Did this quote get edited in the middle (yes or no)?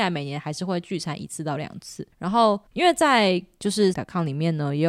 yes